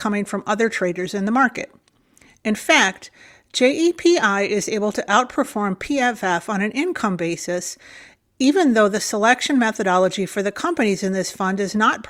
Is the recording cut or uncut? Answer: uncut